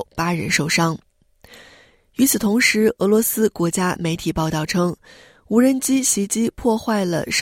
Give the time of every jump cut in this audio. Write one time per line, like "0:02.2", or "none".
none